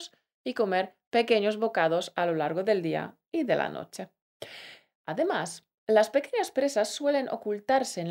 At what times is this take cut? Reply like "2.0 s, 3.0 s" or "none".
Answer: none